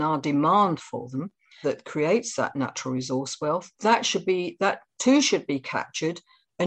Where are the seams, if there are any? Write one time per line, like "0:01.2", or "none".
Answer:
0:01.6
0:03.7